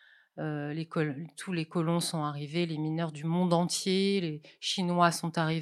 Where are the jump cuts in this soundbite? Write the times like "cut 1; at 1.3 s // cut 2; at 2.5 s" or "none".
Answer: none